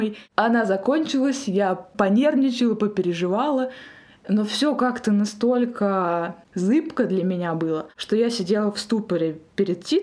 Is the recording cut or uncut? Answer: uncut